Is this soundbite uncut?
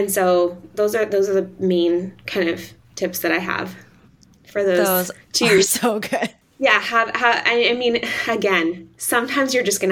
no; 2 cuts; at 5.2 s, 6.4 s

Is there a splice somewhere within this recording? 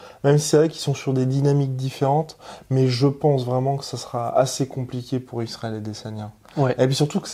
no; 0 cuts

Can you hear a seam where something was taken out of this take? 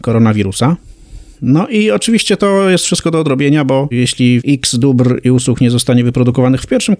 no; 0 cuts

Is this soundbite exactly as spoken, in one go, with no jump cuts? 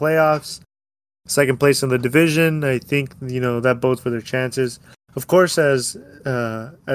no; 1 cut; at 4.0 s

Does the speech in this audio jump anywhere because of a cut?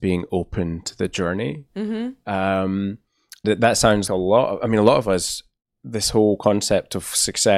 yes; 2 cuts; at 3.4 s, 4.1 s

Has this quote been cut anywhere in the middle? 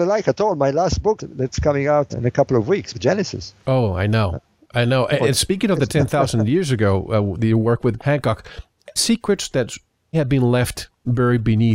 yes; 8 cuts; at 1.2 s, 2.1 s, 2.9 s, 5.2 s, 7.4 s, 8.0 s, 9.0 s, 10.1 s

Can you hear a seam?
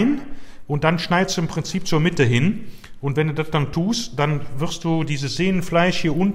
no; 0 cuts

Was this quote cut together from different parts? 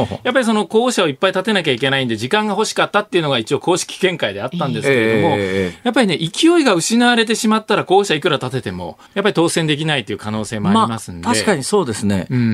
yes; 1 cut; at 9.1 s

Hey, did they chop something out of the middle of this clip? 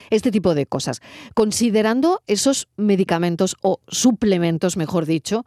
no; 0 cuts

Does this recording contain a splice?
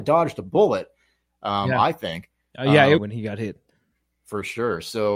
yes; 1 cut; at 3.0 s

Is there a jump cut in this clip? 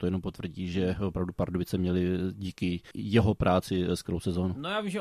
yes; 1 cut; at 2.9 s

